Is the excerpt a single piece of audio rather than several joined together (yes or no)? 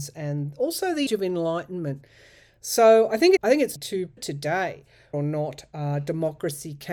no